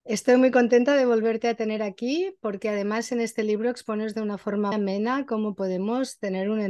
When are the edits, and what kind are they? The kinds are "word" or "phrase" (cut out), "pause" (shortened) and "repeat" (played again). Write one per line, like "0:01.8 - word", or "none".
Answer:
0:04.7 - word